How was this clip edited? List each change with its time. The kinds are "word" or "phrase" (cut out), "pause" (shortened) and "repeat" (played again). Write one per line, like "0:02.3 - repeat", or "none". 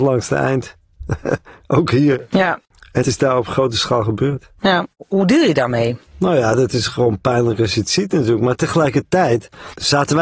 0:03.0 - word
0:04.9 - pause
0:06.1 - pause